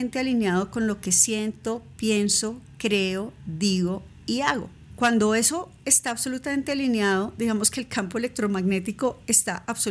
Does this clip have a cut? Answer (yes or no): no